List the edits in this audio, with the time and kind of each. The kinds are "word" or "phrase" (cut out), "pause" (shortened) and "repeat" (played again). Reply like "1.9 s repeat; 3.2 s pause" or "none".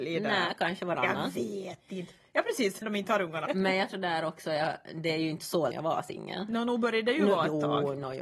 2.8 s word; 3.5 s word; 3.9 s word; 5.7 s phrase